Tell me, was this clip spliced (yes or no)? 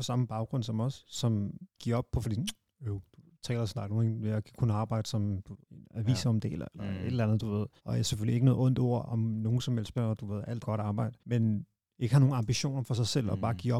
yes